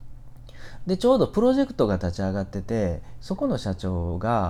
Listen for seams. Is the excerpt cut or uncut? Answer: cut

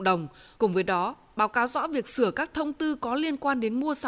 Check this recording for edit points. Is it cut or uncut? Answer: uncut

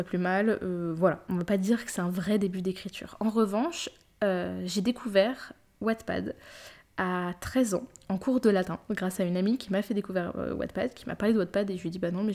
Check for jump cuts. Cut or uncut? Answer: uncut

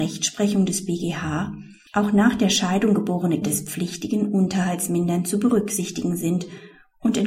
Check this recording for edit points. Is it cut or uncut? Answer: cut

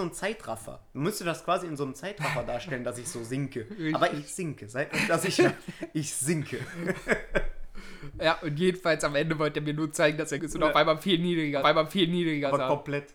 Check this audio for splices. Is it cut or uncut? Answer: cut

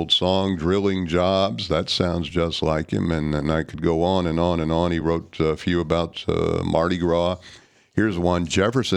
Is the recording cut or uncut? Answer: uncut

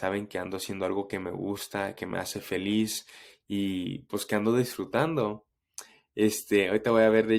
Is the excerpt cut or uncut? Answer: uncut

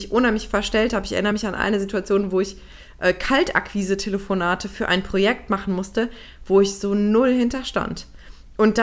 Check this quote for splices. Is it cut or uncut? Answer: uncut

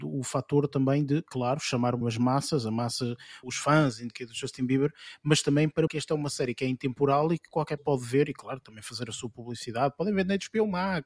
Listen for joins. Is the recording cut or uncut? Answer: cut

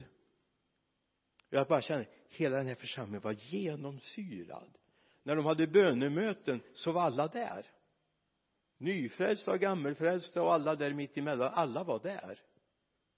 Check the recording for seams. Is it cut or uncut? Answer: uncut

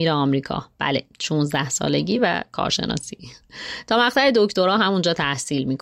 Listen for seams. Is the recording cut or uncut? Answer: uncut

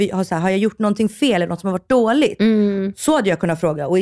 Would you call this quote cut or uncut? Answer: uncut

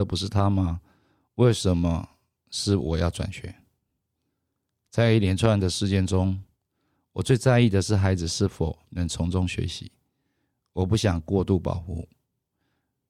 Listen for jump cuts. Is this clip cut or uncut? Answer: uncut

